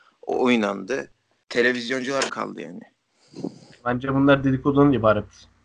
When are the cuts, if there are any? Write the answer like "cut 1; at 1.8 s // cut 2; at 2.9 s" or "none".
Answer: cut 1; at 2.3 s